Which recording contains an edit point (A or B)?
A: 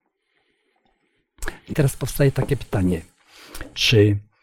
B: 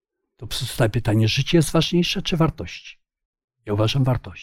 A